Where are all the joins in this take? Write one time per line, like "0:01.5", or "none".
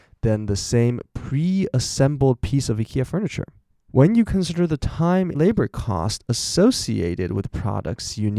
0:03.7
0:05.3